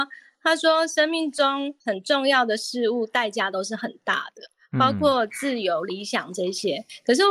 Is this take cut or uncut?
cut